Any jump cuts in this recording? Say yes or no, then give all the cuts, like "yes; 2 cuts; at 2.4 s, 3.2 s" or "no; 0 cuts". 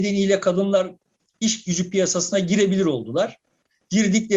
no; 0 cuts